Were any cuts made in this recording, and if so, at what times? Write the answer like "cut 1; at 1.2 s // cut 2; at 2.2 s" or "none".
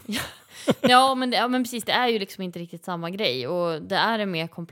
none

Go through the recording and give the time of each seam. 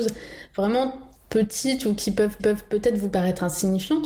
cut 1; at 1.2 s // cut 2; at 2.4 s

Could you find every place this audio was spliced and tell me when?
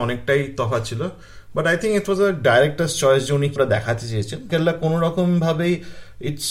cut 1; at 3.6 s // cut 2; at 4.5 s

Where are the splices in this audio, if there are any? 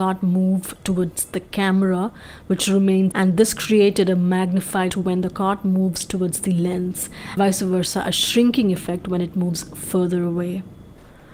cut 1; at 3.1 s // cut 2; at 4.9 s // cut 3; at 7.4 s

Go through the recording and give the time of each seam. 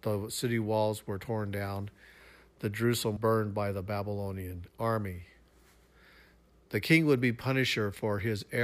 cut 1; at 3.2 s

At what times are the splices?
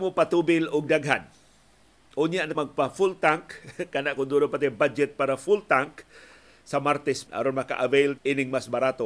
cut 1; at 2.5 s // cut 2; at 7.3 s // cut 3; at 8.2 s

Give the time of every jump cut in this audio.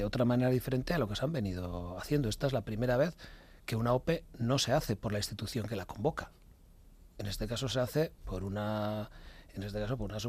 none

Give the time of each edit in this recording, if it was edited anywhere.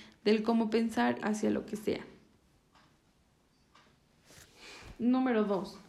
cut 1; at 1.2 s

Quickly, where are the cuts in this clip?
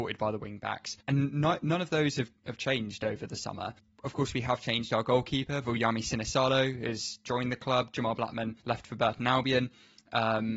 cut 1; at 1.0 s // cut 2; at 3.8 s // cut 3; at 8.6 s

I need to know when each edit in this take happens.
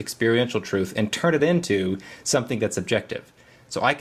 none

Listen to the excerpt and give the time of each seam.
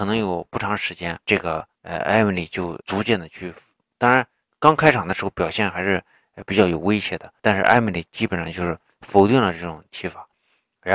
cut 1; at 1.2 s // cut 2; at 1.7 s // cut 3; at 2.8 s // cut 4; at 7.4 s

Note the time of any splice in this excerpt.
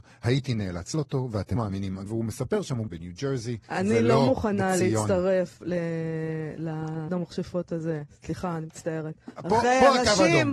cut 1; at 0.9 s // cut 2; at 1.6 s // cut 3; at 2.1 s // cut 4; at 2.9 s // cut 5; at 3.6 s // cut 6; at 7.1 s

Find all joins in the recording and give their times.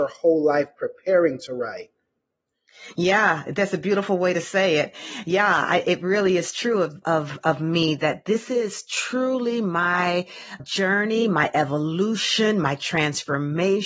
cut 1; at 7.0 s // cut 2; at 10.6 s

